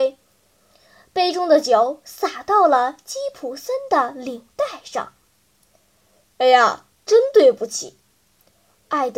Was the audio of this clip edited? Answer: no; 0 cuts

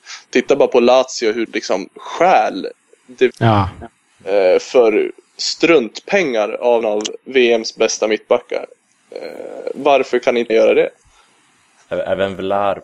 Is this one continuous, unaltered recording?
no; 4 cuts; at 1.5 s, 3.3 s, 6.8 s, 10.5 s

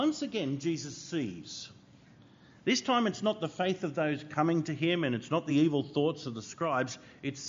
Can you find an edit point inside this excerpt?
no; 0 cuts

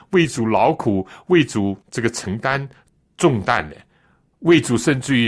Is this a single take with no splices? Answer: no; 2 cuts; at 1.8 s, 2.9 s

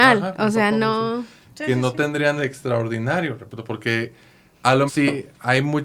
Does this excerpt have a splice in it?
yes; 2 cuts; at 2.4 s, 4.9 s

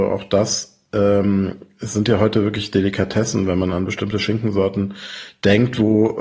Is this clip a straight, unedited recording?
yes; 0 cuts

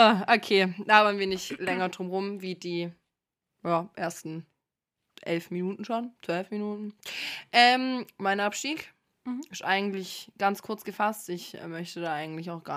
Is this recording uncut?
yes; 0 cuts

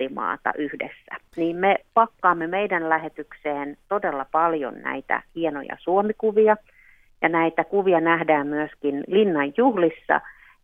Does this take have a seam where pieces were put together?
no; 0 cuts

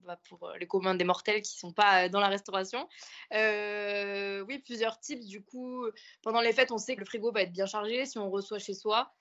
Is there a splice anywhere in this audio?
yes; 1 cut; at 7.0 s

